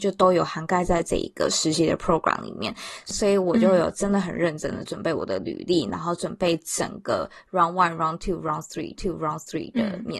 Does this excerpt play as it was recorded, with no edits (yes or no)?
no